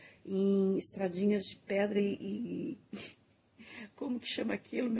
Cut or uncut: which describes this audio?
cut